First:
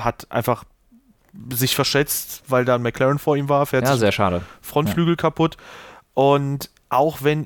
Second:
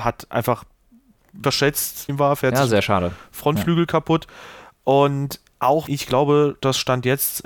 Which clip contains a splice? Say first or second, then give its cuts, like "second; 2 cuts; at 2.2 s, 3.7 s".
second; 3 cuts; at 1.4 s, 2.1 s, 5.9 s